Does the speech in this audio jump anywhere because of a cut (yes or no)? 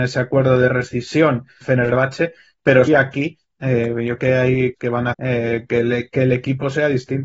yes